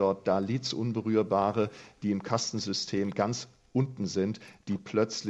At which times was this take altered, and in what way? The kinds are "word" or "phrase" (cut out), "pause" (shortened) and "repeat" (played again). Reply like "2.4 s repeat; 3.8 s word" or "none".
none